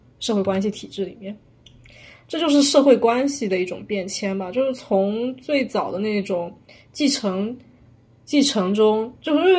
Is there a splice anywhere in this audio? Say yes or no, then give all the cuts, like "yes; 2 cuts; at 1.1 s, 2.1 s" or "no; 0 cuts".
no; 0 cuts